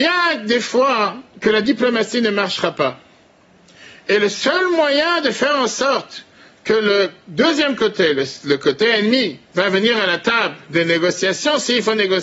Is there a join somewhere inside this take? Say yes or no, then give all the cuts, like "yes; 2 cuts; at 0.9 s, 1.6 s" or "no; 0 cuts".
no; 0 cuts